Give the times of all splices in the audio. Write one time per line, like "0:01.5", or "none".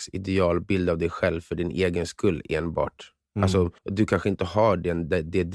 0:03.8